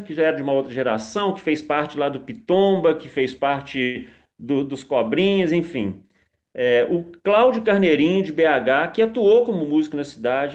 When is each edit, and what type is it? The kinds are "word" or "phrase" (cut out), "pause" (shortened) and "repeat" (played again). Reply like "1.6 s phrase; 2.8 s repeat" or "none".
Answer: none